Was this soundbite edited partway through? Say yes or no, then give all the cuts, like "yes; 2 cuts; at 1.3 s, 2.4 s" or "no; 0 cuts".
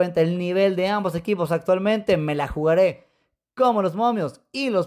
no; 0 cuts